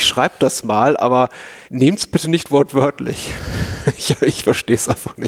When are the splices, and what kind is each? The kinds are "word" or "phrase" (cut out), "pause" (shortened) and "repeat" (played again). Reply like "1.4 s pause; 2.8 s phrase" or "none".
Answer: 1.7 s pause